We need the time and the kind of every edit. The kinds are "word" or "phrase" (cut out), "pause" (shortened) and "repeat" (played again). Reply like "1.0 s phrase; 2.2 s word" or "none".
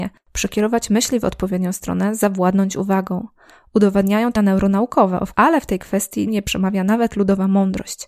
4.4 s word; 5.3 s word; 6.3 s word